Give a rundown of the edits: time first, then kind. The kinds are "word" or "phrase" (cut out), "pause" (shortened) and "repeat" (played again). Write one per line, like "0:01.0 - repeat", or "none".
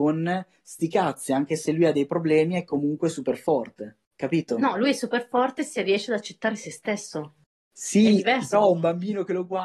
0:04.0 - pause
0:08.5 - word

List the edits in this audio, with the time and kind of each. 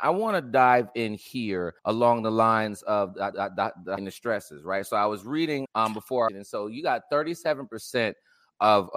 0:01.8 - pause
0:03.3 - repeat
0:04.0 - phrase
0:05.7 - word
0:06.3 - phrase

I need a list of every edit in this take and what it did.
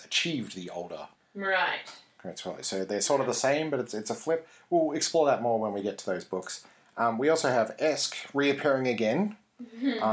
none

